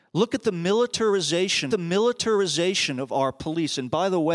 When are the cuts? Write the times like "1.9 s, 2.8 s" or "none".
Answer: 1.7 s